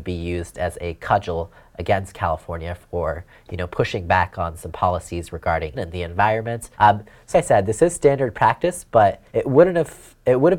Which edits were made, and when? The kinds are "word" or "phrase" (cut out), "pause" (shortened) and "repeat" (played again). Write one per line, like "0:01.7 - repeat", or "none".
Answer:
0:05.7 - word
0:06.7 - pause
0:07.3 - word
0:09.3 - pause